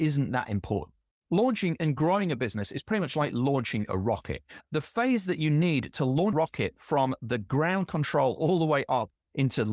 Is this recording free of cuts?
no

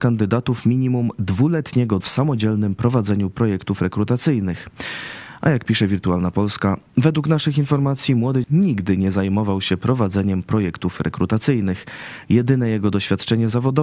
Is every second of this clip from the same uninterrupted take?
no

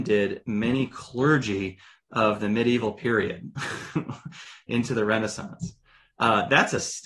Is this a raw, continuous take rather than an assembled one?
yes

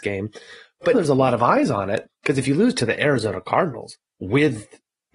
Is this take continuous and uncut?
no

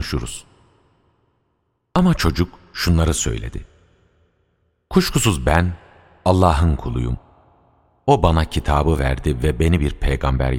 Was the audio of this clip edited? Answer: no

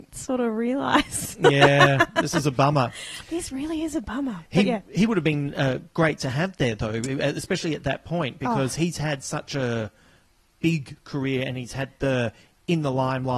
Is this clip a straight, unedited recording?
yes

